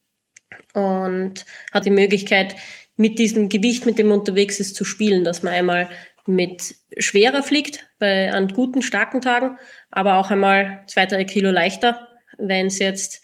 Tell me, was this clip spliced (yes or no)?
yes